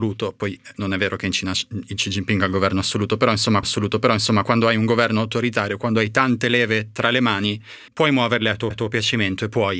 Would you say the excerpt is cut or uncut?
cut